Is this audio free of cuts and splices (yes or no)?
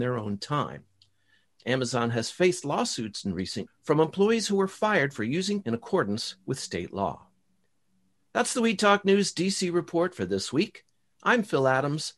no